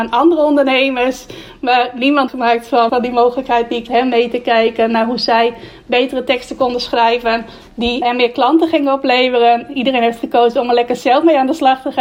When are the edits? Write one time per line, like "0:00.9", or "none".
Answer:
0:02.3
0:02.9
0:03.9
0:08.0